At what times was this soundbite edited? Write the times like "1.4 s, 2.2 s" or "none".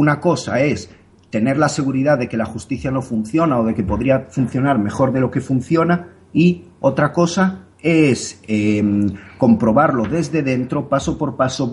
7.7 s